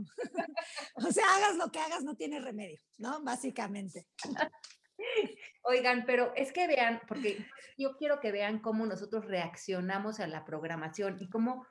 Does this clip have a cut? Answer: no; 0 cuts

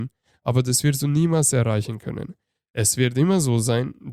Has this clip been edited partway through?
no; 0 cuts

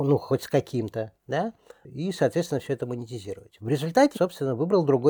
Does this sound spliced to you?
yes; 2 cuts; at 1.2 s, 4.1 s

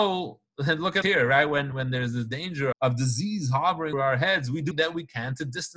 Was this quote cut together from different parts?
yes; 5 cuts; at 1.0 s, 1.7 s, 2.7 s, 3.9 s, 4.7 s

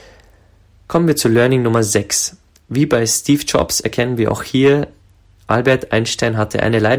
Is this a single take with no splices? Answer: yes; 0 cuts

